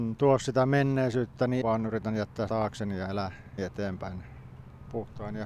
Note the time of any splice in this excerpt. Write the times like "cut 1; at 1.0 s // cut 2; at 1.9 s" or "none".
cut 1; at 1.6 s // cut 2; at 2.5 s // cut 3; at 3.6 s

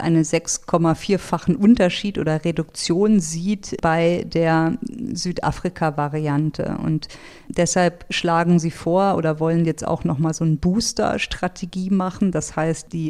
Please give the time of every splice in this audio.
none

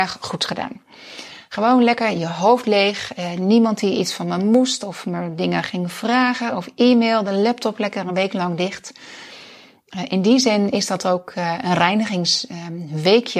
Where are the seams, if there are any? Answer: none

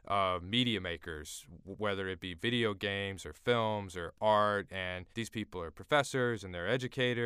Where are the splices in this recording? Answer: cut 1; at 5.1 s

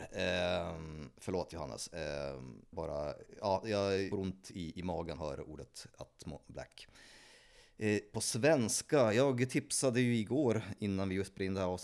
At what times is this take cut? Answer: cut 1; at 2.7 s // cut 2; at 4.1 s // cut 3; at 5.2 s // cut 4; at 8.1 s

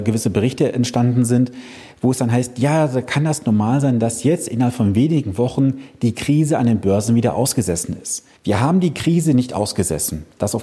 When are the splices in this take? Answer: cut 1; at 8.4 s

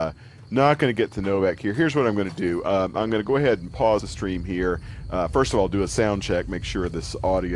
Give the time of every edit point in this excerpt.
cut 1; at 4.0 s

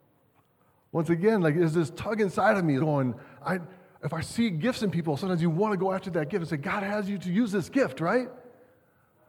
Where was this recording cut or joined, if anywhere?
cut 1; at 2.8 s // cut 2; at 3.4 s

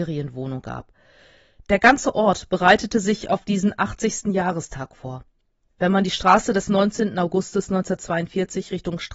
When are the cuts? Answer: none

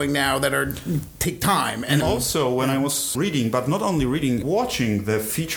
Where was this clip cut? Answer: cut 1; at 2.0 s // cut 2; at 3.1 s // cut 3; at 4.4 s

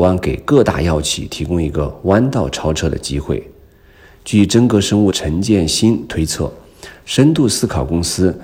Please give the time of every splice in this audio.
cut 1; at 5.1 s

